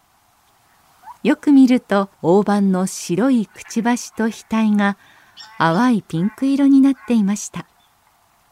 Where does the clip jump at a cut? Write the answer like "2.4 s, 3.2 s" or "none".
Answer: 1.2 s, 2.1 s